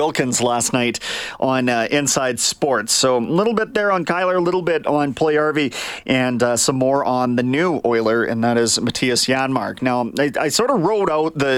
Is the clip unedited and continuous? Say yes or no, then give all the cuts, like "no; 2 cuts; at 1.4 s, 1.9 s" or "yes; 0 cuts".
yes; 0 cuts